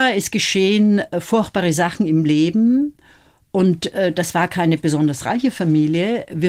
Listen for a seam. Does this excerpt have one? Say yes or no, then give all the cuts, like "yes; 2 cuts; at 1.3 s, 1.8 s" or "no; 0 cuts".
no; 0 cuts